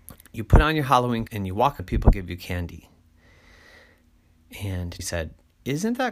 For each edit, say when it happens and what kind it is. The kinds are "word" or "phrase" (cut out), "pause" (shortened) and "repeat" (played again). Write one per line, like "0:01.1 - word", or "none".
0:01.3 - word
0:01.8 - word
0:05.0 - word